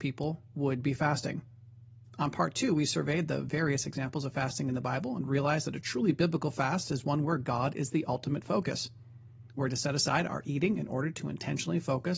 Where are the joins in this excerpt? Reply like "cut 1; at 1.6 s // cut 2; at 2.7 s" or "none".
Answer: none

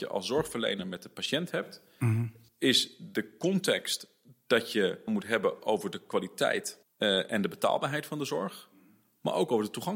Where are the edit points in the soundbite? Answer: cut 1; at 5.1 s // cut 2; at 6.8 s

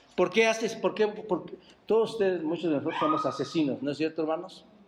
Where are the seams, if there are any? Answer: none

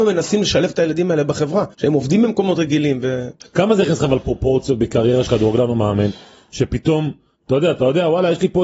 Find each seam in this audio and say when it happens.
cut 1; at 1.7 s // cut 2; at 3.4 s // cut 3; at 5.3 s

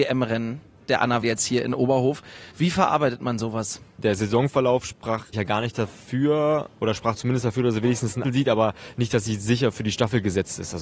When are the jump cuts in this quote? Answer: cut 1; at 1.2 s // cut 2; at 2.5 s // cut 3; at 5.3 s // cut 4; at 8.2 s

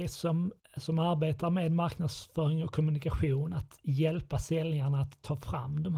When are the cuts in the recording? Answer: none

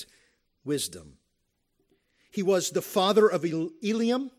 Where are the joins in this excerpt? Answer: none

